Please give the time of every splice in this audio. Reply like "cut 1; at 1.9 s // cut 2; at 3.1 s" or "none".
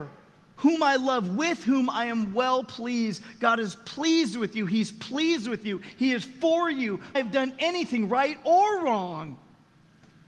cut 1; at 7.1 s